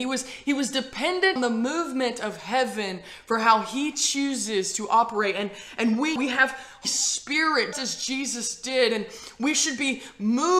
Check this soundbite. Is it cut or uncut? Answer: cut